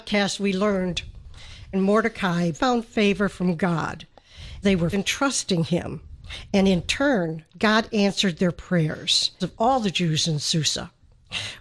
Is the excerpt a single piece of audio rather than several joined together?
no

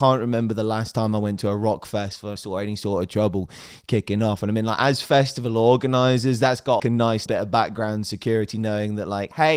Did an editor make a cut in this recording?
yes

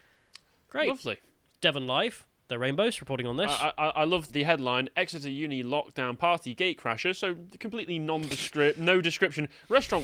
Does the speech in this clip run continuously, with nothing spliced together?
no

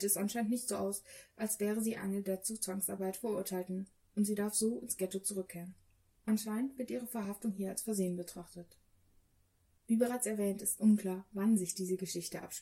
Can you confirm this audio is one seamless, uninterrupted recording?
yes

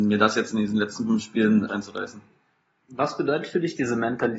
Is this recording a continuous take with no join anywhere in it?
no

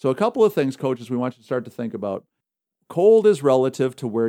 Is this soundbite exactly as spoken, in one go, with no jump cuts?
yes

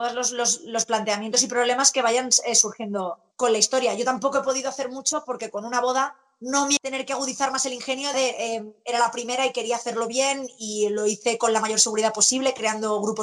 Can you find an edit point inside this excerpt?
yes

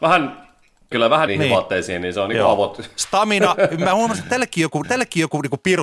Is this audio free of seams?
no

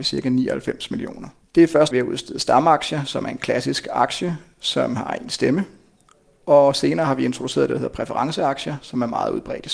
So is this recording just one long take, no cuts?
no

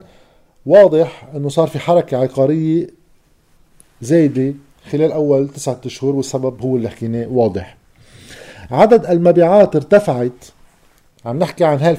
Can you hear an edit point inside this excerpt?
no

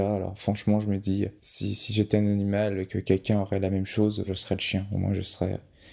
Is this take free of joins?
no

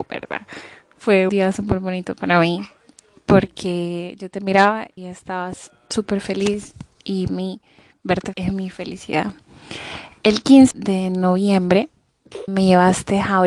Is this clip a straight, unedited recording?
no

